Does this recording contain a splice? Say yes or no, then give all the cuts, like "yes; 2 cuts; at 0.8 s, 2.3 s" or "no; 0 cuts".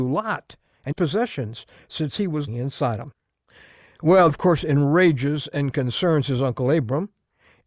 yes; 3 cuts; at 0.9 s, 2.5 s, 4.3 s